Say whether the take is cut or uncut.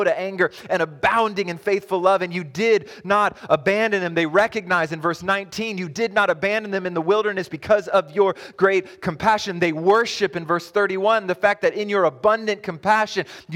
uncut